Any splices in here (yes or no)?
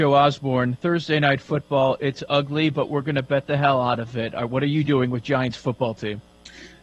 no